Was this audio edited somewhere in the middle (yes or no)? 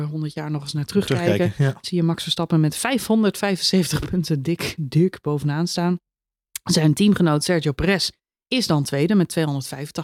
no